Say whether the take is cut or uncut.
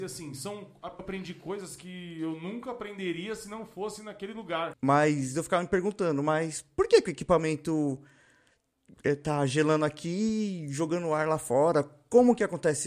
cut